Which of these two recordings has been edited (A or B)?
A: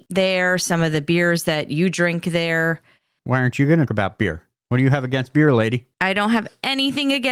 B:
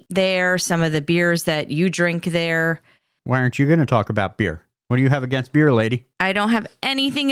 A